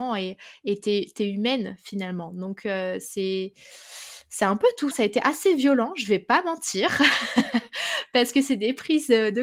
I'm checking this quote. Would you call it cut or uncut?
cut